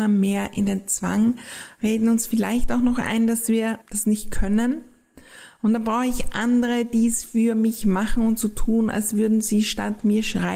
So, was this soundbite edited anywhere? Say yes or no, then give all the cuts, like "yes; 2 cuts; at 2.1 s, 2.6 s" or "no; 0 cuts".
yes; 1 cut; at 3.8 s